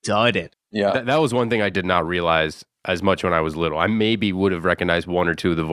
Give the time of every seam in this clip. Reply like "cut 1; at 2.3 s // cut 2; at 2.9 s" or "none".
cut 1; at 1.7 s